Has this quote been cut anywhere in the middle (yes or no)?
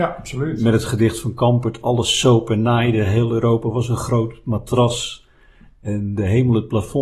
no